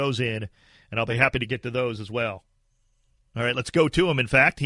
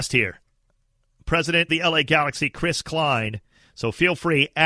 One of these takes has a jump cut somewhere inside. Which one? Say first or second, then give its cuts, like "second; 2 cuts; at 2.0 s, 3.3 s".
second; 1 cut; at 1.7 s